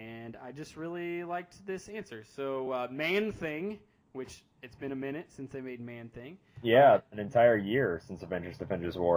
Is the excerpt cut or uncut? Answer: uncut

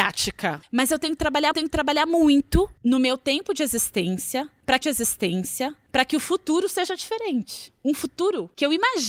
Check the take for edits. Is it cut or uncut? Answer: cut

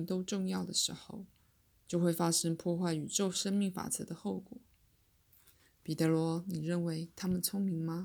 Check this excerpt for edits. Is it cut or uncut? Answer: uncut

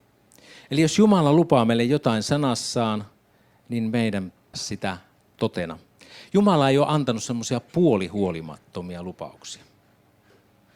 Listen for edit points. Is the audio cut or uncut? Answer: cut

